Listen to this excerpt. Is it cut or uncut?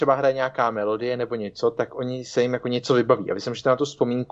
uncut